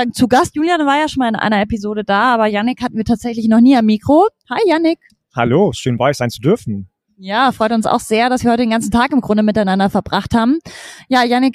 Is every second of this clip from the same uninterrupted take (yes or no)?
yes